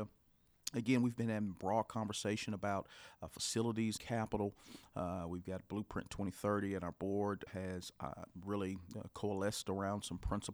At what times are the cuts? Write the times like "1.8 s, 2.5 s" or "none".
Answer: 4.0 s, 7.5 s